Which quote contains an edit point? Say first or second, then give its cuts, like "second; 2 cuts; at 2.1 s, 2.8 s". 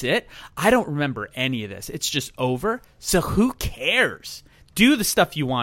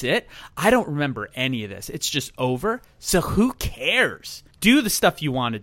second; 1 cut; at 4.5 s